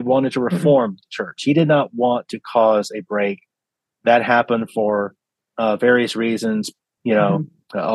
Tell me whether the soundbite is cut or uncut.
uncut